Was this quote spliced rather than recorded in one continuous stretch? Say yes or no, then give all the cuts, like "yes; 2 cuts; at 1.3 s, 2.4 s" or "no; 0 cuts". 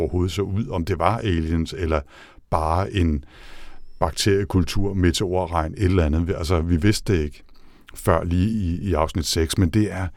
no; 0 cuts